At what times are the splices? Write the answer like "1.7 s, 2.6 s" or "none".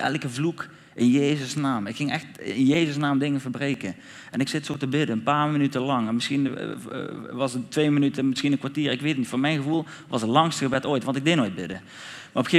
none